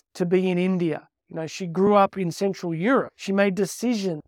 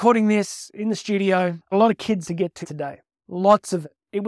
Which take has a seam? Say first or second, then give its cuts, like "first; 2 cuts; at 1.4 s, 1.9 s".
second; 3 cuts; at 1.7 s, 2.2 s, 2.6 s